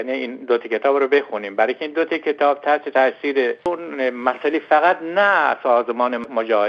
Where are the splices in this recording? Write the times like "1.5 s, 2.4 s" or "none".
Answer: none